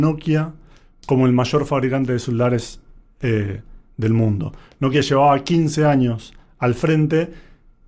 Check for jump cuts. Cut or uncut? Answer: uncut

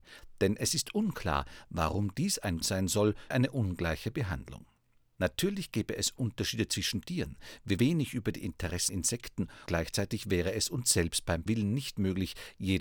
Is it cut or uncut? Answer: cut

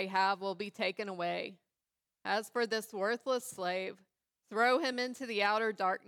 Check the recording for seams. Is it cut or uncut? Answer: uncut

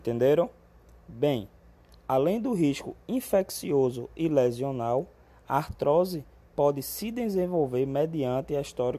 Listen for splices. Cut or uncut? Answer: uncut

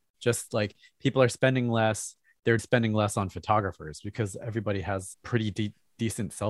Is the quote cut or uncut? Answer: cut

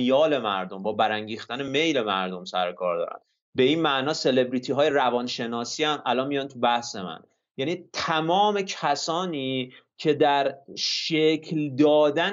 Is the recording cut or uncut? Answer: uncut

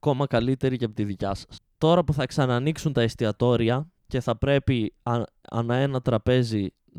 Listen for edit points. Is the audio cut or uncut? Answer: cut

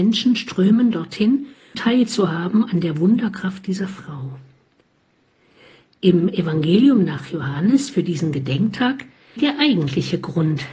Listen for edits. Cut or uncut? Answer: cut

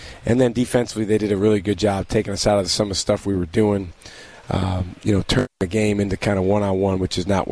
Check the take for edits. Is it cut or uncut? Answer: uncut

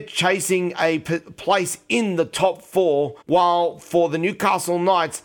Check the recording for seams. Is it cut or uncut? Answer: cut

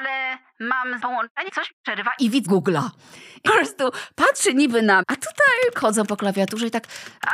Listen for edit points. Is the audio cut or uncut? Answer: cut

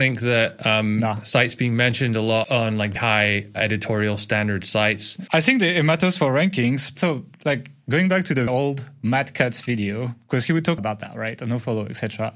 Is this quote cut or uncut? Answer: cut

